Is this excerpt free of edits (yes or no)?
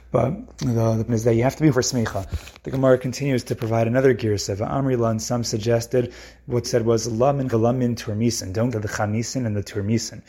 no